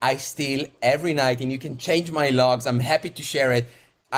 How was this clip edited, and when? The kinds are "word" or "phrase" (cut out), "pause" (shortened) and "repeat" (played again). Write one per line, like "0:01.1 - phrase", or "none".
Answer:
none